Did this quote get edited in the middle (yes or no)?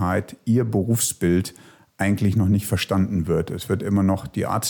no